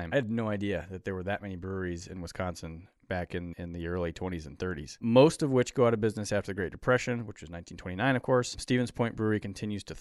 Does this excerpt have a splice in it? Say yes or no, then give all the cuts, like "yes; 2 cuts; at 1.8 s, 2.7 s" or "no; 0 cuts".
yes; 1 cut; at 3.5 s